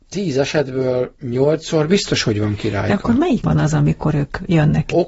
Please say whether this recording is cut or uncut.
cut